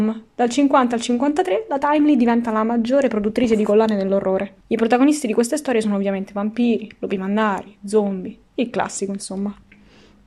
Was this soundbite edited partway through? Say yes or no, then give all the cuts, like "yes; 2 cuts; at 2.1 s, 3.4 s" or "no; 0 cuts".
yes; 2 cuts; at 4.6 s, 8.4 s